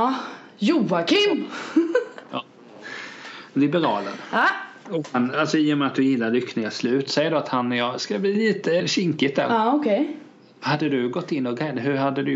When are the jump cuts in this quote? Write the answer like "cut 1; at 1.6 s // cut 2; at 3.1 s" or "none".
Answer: cut 1; at 8.8 s

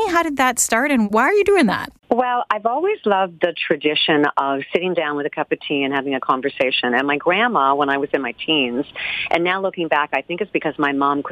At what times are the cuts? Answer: cut 1; at 2.0 s

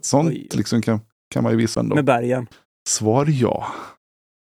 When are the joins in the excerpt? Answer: cut 1; at 1.7 s // cut 2; at 2.7 s

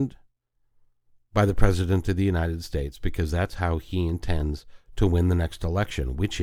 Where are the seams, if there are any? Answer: none

